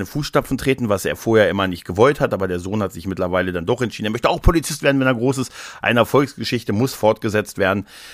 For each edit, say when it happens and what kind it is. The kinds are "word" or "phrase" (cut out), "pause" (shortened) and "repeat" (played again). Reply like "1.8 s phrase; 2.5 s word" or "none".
none